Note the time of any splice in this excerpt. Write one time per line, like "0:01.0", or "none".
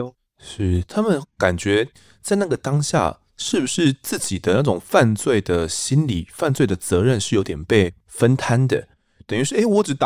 none